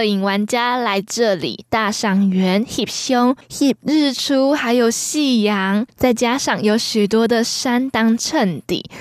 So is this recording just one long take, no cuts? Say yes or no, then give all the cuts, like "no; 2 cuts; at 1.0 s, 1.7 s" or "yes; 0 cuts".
yes; 0 cuts